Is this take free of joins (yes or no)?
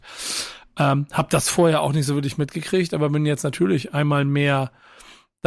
yes